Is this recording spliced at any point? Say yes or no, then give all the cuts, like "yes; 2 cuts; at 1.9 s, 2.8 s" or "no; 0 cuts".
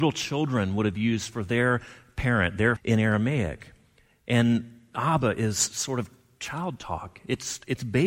yes; 1 cut; at 2.8 s